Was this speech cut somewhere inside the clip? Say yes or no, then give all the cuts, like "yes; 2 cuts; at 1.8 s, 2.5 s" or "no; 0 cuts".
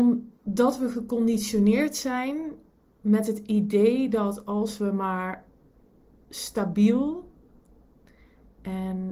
no; 0 cuts